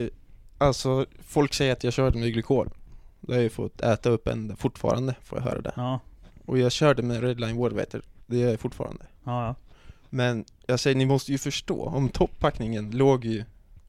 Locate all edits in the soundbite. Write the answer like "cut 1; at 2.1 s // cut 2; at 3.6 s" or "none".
none